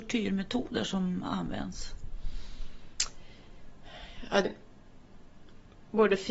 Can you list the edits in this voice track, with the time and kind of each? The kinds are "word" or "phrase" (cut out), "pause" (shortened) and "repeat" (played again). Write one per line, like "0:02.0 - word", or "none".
0:04.4 - word